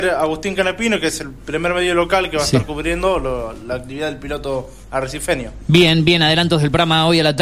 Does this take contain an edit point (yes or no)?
no